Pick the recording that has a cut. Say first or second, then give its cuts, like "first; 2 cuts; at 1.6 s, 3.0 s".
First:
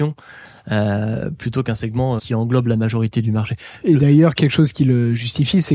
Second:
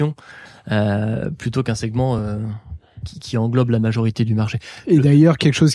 first; 1 cut; at 2.2 s